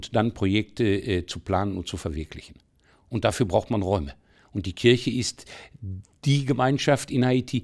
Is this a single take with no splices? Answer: yes; 0 cuts

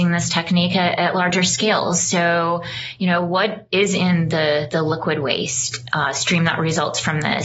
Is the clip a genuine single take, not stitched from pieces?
yes; 0 cuts

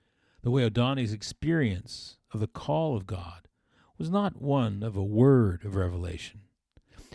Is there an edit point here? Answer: no; 0 cuts

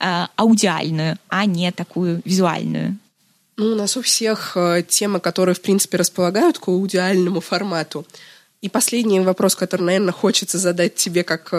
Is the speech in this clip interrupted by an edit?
no; 0 cuts

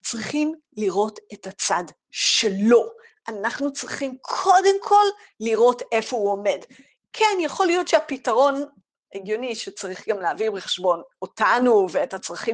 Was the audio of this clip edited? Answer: no; 0 cuts

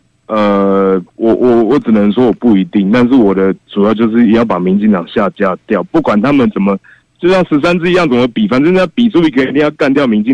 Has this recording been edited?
yes; 1 cut; at 1.1 s

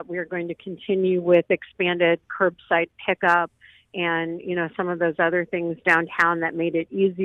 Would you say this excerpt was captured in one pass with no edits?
yes; 0 cuts

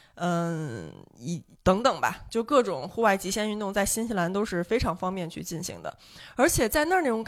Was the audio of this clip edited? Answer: yes; 1 cut; at 1.5 s

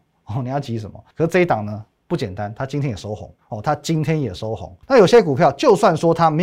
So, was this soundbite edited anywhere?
yes; 3 cuts; at 1.1 s, 3.4 s, 4.8 s

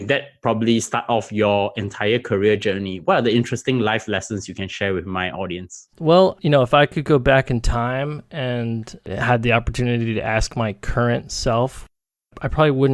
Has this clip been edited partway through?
yes; 1 cut; at 5.9 s

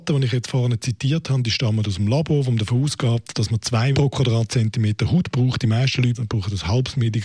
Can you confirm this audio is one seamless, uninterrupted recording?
no; 1 cut; at 3.9 s

